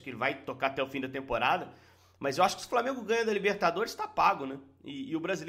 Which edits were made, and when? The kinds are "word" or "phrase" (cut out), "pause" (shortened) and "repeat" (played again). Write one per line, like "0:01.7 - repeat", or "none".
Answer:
none